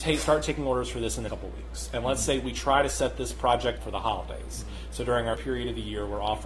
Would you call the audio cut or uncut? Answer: cut